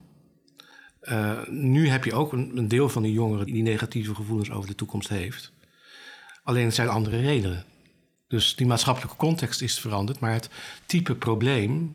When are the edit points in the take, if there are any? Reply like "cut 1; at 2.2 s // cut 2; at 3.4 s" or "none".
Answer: cut 1; at 3.5 s